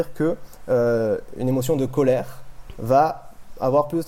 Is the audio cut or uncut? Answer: uncut